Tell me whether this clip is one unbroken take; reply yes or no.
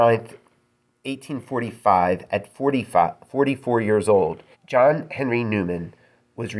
no